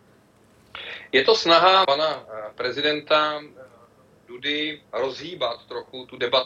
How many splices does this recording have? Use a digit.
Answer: 2